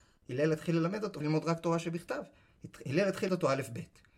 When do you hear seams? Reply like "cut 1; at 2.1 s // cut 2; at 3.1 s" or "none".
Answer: cut 1; at 1.2 s // cut 2; at 3.3 s